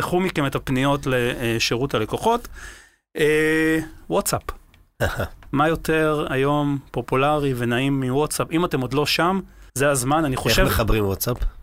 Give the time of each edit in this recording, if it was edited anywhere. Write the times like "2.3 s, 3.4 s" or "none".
9.7 s